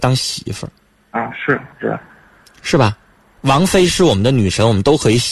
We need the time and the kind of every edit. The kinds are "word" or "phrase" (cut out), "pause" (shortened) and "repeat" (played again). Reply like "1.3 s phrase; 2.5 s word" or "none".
1.7 s pause